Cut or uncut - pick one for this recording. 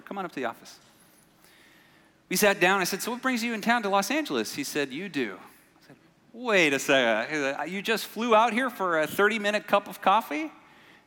uncut